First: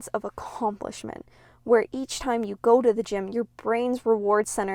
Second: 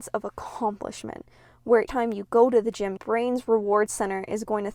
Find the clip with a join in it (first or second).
second